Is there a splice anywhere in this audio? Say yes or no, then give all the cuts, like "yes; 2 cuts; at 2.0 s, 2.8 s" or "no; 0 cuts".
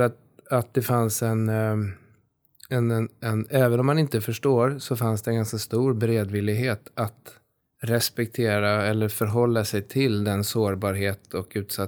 no; 0 cuts